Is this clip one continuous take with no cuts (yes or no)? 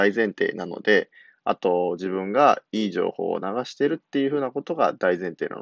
yes